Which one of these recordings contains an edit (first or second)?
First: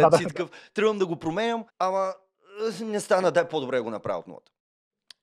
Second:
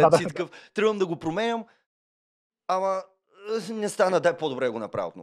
first